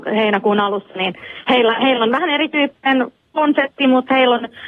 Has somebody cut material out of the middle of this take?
no; 0 cuts

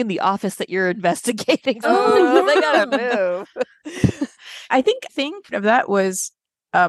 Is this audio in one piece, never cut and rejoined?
no; 5 cuts; at 1.8 s, 4.3 s, 4.7 s, 5.1 s, 5.5 s

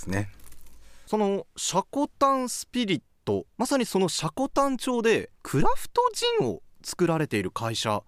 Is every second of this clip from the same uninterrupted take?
no; 2 cuts; at 3.5 s, 5.3 s

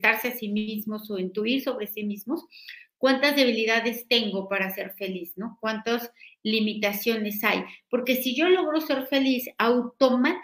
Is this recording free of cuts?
yes; 0 cuts

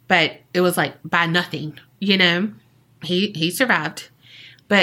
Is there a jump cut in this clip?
no; 0 cuts

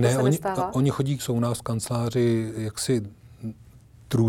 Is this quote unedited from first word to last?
no; 1 cut; at 1.2 s

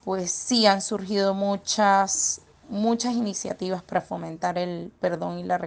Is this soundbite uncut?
yes; 0 cuts

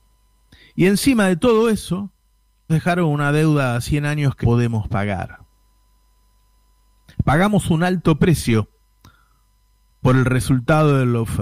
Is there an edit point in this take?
yes; 2 cuts; at 2.7 s, 4.4 s

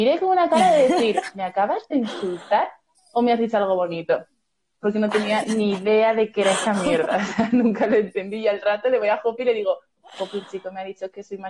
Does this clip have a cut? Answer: no; 0 cuts

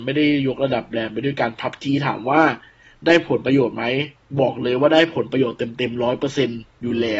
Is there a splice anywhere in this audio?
no; 0 cuts

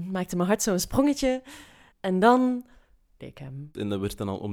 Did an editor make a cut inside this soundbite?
yes; 2 cuts; at 1.9 s, 3.2 s

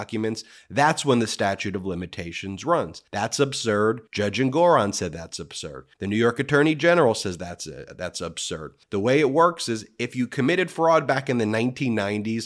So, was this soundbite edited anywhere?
yes; 4 cuts; at 3.1 s, 4.1 s, 5.9 s, 8.8 s

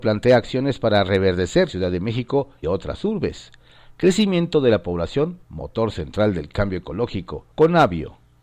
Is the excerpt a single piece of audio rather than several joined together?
no; 4 cuts; at 1.7 s, 2.6 s, 5.4 s, 7.5 s

